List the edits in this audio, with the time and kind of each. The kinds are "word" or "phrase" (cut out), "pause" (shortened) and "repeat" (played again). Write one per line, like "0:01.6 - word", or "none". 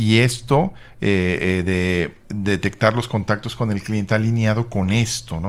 0:04.1 - word